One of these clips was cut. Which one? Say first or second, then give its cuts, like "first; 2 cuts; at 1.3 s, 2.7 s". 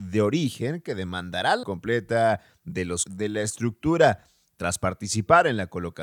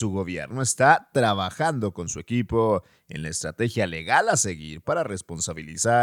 first; 2 cuts; at 1.6 s, 3.1 s